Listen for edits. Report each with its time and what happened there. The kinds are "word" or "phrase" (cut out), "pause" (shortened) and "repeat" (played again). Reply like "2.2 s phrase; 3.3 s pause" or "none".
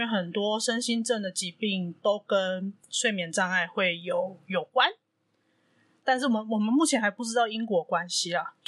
none